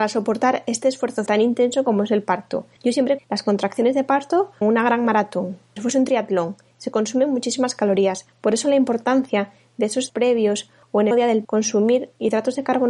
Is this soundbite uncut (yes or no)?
no